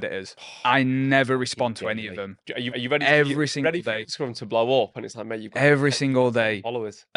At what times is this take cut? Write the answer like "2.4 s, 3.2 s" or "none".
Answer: 2.7 s